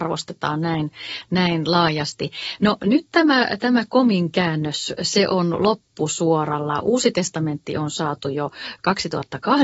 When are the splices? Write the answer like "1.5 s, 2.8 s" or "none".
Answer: none